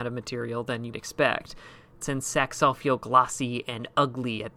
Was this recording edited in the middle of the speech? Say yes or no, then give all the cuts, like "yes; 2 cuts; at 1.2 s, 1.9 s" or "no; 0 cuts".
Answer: yes; 2 cuts; at 0.9 s, 2.0 s